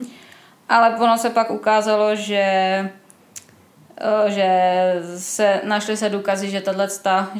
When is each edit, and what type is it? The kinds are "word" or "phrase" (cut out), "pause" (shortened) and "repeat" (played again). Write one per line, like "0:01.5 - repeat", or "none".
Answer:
none